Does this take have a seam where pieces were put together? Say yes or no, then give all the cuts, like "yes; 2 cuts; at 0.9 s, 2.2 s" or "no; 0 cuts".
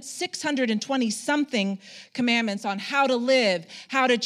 no; 0 cuts